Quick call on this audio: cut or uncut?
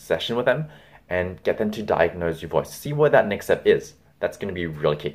uncut